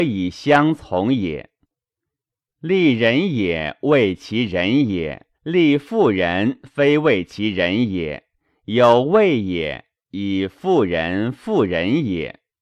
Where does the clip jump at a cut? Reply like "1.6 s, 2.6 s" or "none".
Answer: 5.3 s